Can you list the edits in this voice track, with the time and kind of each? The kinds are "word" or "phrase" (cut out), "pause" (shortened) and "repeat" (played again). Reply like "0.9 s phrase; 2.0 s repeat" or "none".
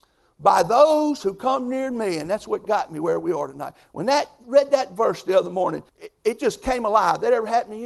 5.9 s pause